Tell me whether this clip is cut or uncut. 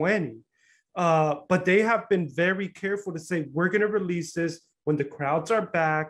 uncut